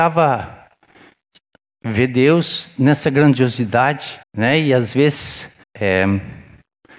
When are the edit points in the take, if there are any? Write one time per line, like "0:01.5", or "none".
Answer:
0:04.2
0:05.6